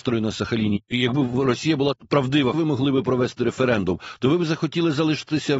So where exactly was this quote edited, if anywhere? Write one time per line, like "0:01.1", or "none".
0:02.5